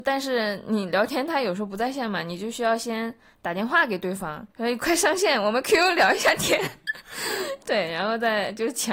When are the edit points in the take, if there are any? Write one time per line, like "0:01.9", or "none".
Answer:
0:04.5